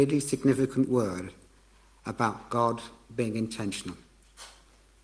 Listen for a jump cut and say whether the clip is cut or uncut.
uncut